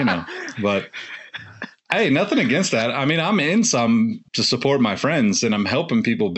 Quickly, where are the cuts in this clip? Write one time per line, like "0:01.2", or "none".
0:04.3